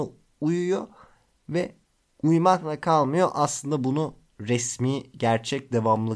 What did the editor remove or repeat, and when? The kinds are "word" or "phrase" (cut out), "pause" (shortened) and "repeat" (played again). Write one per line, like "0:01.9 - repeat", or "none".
none